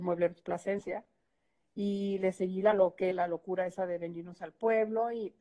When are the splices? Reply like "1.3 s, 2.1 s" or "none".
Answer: 3.1 s

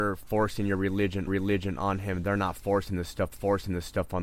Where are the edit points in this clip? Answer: 1.3 s, 3.3 s

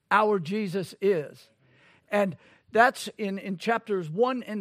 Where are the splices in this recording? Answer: none

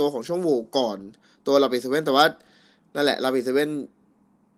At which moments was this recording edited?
none

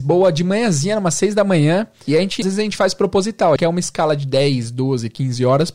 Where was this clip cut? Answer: 2.4 s, 3.6 s

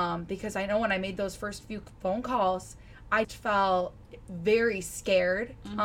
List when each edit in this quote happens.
3.2 s

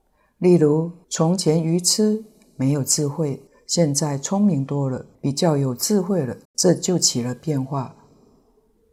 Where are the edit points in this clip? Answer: 1.0 s, 3.5 s, 5.1 s, 6.4 s

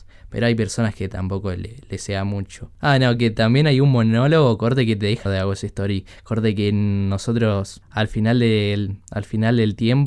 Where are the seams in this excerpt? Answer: 5.3 s

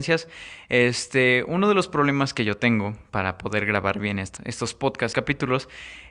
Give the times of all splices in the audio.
4.4 s, 5.1 s

